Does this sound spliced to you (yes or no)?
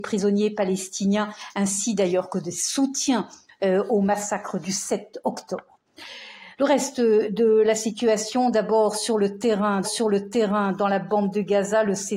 yes